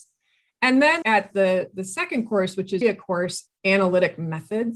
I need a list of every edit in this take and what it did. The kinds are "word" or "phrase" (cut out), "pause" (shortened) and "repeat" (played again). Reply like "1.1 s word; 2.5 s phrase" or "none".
1.0 s word; 2.8 s word; 3.5 s word